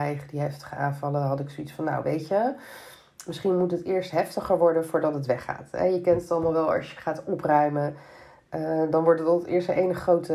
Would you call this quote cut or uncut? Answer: uncut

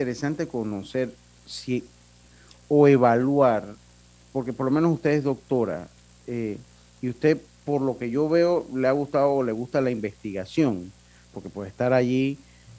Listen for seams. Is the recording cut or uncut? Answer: uncut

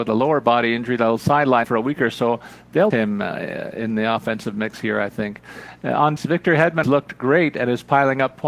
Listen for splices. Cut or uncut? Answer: cut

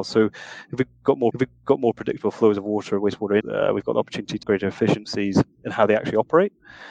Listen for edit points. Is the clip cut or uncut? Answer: cut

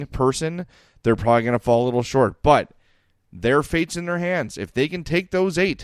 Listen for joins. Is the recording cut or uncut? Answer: uncut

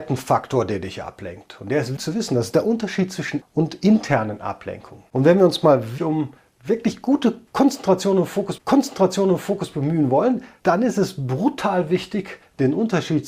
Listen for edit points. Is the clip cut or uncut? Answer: cut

